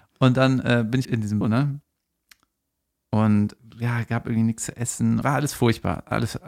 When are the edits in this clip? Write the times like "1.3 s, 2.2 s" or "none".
1.0 s, 1.4 s, 3.6 s, 5.2 s